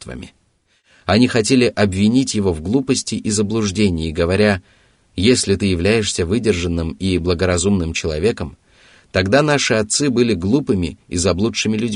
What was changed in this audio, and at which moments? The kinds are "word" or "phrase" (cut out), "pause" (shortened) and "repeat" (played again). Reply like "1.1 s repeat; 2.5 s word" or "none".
none

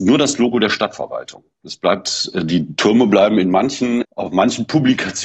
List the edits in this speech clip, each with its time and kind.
1.5 s pause; 4.0 s word

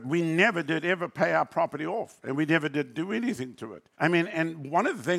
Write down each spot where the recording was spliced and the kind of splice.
3.9 s pause

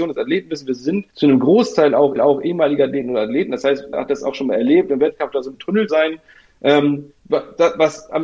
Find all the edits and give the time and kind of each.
1.1 s pause; 2.2 s repeat; 3.9 s word; 5.5 s word; 5.9 s word; 7.2 s pause

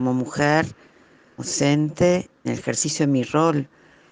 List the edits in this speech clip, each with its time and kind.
1.4 s word; 2.4 s word

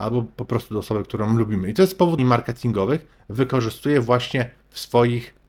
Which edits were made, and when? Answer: 2.2 s phrase

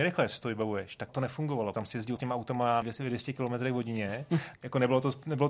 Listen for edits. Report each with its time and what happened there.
1.1 s word; 1.7 s word; 2.2 s word; 2.8 s word; 4.5 s word

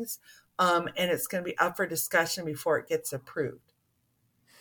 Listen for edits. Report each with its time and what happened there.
none

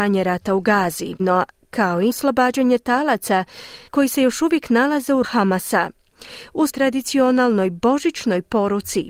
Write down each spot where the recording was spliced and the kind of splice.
1.2 s phrase; 2.1 s word; 3.9 s pause; 5.2 s word; 6.7 s word

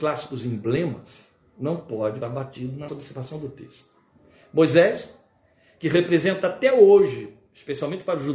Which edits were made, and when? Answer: 2.2 s word; 2.9 s word

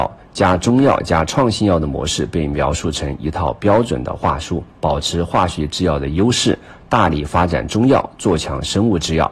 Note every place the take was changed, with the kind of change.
4.7 s pause

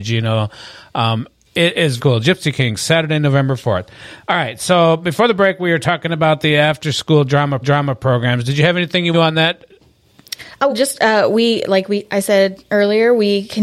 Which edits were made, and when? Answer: 1.4 s pause; 2.0 s word; 7.6 s repeat; 9.1 s phrase; 10.7 s word

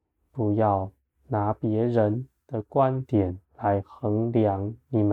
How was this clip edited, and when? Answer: 1.0 s pause; 3.4 s pause

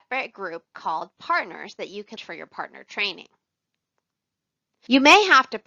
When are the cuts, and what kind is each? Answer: 2.2 s word

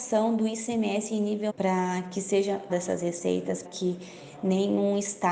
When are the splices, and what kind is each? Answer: 1.5 s word; 2.7 s word; 3.6 s word

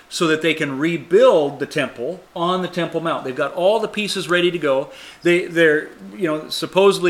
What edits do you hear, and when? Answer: 2.3 s pause

